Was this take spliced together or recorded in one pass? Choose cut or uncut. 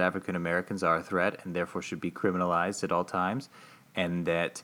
uncut